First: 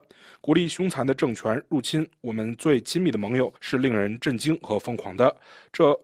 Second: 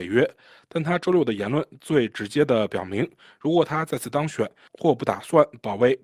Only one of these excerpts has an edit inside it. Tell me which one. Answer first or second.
first